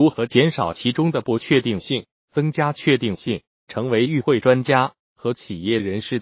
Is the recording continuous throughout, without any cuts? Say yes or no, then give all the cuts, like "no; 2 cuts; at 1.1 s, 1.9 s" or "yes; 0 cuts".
yes; 0 cuts